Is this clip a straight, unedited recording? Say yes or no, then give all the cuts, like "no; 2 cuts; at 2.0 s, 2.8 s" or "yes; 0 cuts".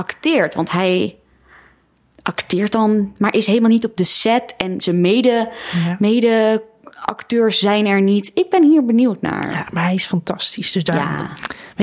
yes; 0 cuts